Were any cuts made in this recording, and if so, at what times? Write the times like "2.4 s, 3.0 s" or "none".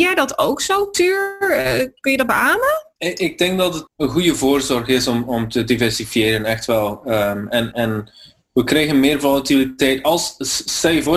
3.0 s, 3.9 s, 7.7 s